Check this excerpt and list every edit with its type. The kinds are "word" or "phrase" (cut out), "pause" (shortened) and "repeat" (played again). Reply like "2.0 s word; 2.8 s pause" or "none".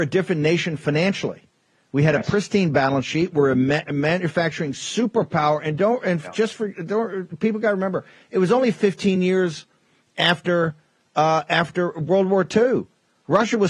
none